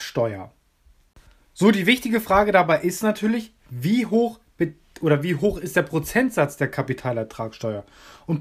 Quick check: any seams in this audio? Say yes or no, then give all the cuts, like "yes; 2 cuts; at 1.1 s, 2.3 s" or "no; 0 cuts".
no; 0 cuts